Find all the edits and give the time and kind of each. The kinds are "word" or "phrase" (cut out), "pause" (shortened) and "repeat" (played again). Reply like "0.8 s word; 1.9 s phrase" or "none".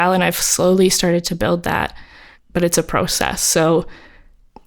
none